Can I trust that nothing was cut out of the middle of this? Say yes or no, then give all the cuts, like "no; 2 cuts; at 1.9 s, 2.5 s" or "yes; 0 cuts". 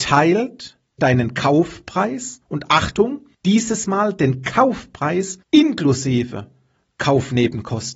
no; 4 cuts; at 1.0 s, 2.4 s, 3.3 s, 5.4 s